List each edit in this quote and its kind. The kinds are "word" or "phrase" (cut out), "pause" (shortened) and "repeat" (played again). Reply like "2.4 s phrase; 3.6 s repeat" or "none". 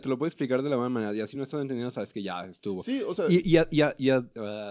none